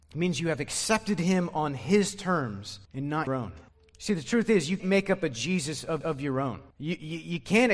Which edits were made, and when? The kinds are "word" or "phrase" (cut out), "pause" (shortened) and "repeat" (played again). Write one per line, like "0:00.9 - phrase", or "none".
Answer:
0:02.8 - pause
0:03.3 - word
0:03.7 - pause
0:04.8 - word
0:06.0 - repeat
0:06.7 - pause